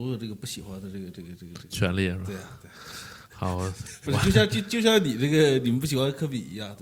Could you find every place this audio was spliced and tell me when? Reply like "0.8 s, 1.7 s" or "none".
4.1 s